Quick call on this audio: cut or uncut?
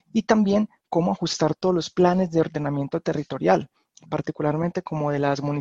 uncut